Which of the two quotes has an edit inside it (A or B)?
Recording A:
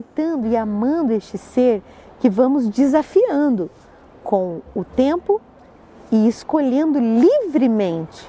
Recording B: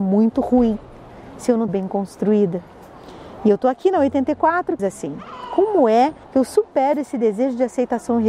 B